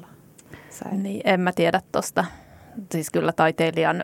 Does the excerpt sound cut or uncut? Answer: uncut